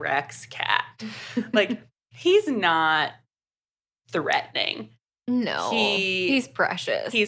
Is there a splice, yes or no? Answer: no